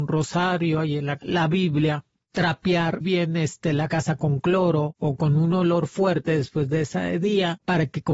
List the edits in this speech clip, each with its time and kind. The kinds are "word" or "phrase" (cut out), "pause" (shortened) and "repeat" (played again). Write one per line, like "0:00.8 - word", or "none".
0:01.2 - word
0:03.0 - word